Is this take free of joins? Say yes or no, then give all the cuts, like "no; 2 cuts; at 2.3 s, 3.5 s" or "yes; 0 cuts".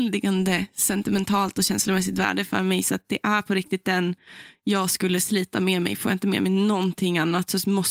yes; 0 cuts